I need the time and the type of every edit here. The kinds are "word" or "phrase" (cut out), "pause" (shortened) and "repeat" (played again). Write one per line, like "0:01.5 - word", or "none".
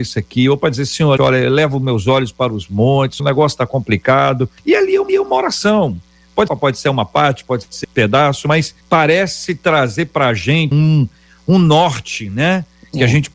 0:01.2 - word
0:03.2 - word
0:04.6 - pause
0:05.1 - repeat
0:06.5 - phrase
0:07.8 - word
0:08.8 - pause
0:10.7 - word

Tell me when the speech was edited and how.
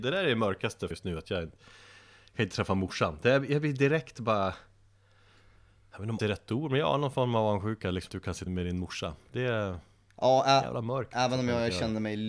0:00.9 - word
0:06.2 - phrase
0:08.1 - word
0:08.5 - phrase

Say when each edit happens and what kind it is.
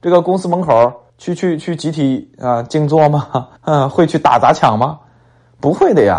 0:01.1 - pause
0:03.6 - pause

